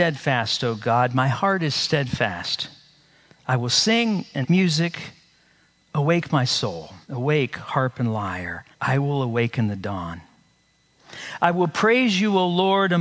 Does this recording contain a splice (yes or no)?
yes